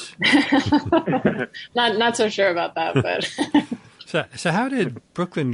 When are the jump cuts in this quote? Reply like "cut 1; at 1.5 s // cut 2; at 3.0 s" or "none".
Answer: none